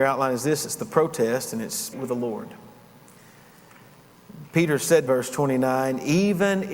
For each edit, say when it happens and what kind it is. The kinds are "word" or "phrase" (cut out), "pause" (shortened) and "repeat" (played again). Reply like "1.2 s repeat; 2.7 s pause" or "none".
1.9 s phrase; 5.1 s phrase